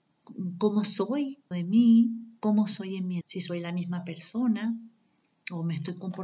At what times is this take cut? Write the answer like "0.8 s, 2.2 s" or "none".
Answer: 1.5 s, 3.2 s